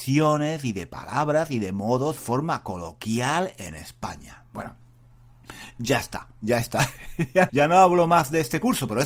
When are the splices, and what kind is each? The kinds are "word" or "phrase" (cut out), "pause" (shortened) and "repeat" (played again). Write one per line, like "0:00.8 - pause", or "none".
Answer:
0:02.2 - phrase
0:07.5 - word